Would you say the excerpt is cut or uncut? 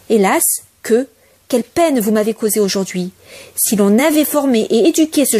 uncut